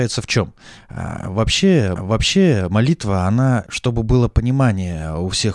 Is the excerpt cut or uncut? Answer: cut